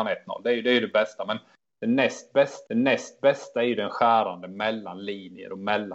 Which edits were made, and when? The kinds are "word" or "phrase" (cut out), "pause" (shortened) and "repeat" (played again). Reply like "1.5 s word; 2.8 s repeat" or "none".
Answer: 2.7 s repeat